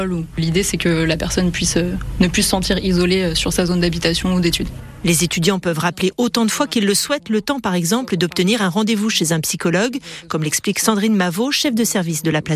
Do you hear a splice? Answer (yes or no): no